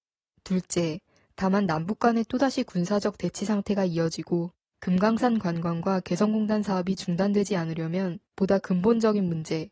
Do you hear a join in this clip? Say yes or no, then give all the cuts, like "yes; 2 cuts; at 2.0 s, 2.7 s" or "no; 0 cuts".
yes; 1 cut; at 8.3 s